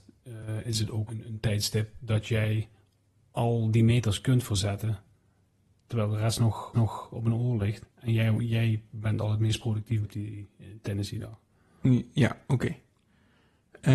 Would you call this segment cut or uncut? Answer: cut